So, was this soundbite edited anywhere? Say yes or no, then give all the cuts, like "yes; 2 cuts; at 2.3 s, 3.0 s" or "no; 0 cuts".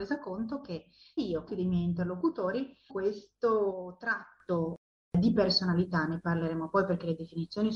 yes; 3 cuts; at 1.2 s, 1.5 s, 2.9 s